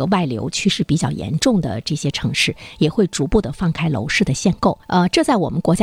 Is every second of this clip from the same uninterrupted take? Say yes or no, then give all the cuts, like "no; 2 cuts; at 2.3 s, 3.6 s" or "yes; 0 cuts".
no; 1 cut; at 4.8 s